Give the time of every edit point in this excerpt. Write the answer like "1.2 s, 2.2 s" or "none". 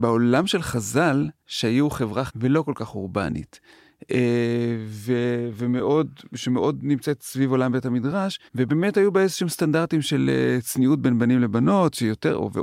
1.4 s, 2.3 s, 8.5 s